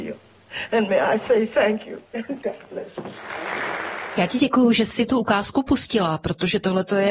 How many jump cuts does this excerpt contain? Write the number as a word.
two